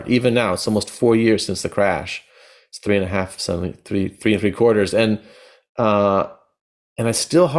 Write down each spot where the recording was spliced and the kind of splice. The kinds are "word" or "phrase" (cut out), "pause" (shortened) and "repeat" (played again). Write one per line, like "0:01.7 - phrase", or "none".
none